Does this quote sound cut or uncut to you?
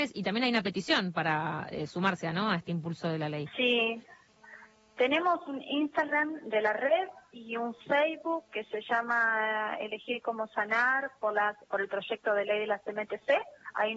cut